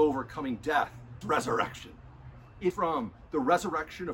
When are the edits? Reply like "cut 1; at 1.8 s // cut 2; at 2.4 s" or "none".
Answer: cut 1; at 1.2 s // cut 2; at 2.7 s